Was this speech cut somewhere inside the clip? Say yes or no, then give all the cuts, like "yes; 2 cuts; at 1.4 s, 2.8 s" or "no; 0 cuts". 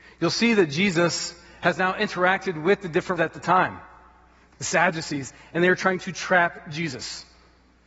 yes; 2 cuts; at 3.2 s, 4.5 s